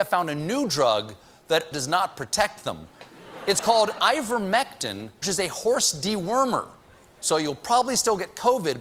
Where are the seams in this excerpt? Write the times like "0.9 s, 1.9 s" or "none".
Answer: 1.7 s, 5.2 s